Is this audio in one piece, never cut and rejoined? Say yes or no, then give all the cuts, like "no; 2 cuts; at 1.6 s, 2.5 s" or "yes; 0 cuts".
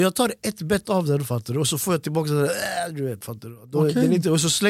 yes; 0 cuts